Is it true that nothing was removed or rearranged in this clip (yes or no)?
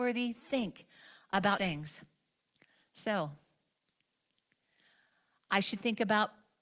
no